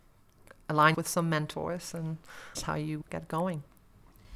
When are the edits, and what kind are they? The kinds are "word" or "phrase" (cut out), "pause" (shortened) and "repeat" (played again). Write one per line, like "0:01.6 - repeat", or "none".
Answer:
0:00.9 - word
0:02.5 - word
0:03.0 - word